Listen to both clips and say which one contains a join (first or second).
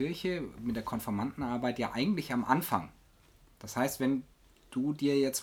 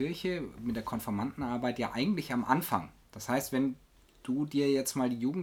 second